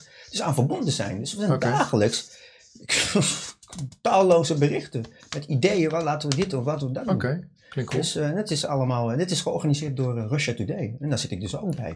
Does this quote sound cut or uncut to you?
uncut